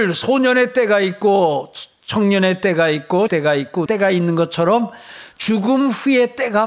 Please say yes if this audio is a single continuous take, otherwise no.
no